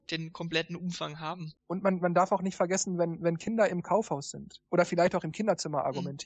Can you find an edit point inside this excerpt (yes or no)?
yes